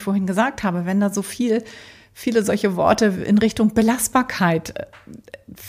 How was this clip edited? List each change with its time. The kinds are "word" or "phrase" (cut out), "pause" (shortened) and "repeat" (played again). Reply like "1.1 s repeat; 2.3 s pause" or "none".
none